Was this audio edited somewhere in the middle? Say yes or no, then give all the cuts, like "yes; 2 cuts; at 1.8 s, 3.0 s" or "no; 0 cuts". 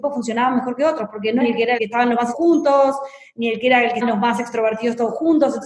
yes; 4 cuts; at 1.4 s, 1.8 s, 2.3 s, 4.0 s